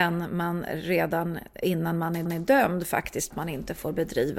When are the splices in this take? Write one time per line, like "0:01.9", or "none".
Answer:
0:01.6
0:02.3
0:03.3